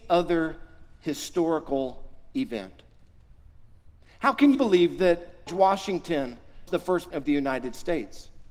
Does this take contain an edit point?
yes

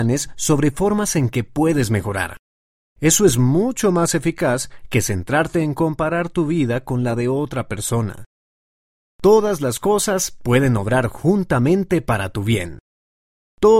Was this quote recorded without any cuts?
yes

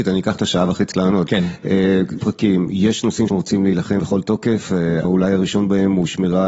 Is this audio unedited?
no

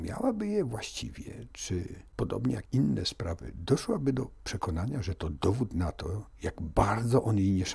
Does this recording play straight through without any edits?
no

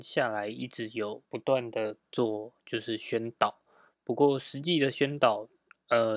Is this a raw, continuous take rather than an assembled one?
no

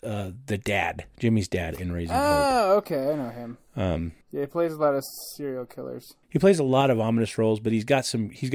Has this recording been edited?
yes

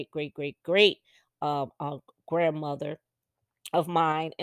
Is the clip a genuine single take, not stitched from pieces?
yes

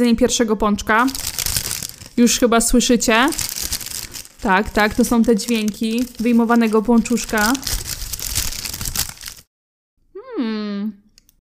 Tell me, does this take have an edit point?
no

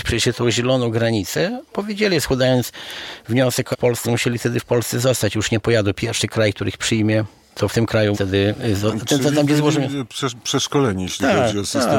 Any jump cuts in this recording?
yes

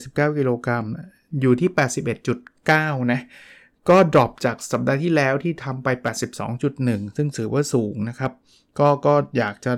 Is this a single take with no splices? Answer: yes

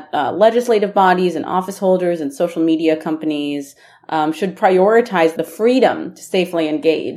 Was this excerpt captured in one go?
yes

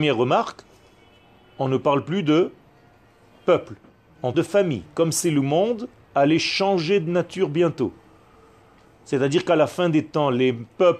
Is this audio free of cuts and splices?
no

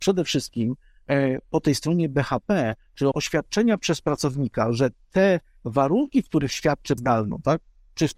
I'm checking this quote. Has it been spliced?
yes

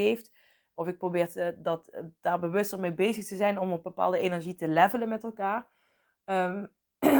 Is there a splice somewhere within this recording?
no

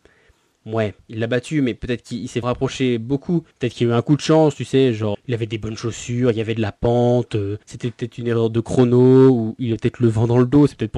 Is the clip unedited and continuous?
no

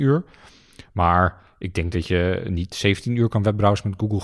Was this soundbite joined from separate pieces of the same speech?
no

